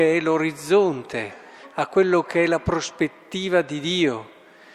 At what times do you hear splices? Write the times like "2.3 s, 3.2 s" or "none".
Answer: none